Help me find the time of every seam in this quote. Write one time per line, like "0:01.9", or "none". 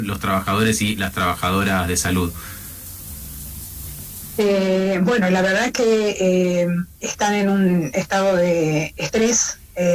0:06.9